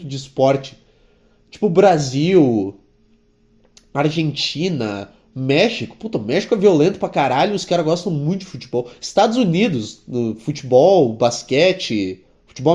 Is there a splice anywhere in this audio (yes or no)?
no